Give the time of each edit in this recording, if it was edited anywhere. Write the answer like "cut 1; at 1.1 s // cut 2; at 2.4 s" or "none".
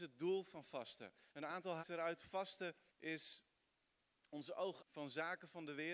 cut 1; at 1.3 s // cut 2; at 1.8 s // cut 3; at 2.9 s // cut 4; at 4.8 s